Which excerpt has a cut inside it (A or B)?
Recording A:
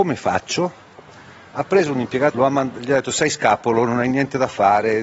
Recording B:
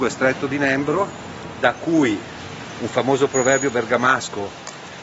A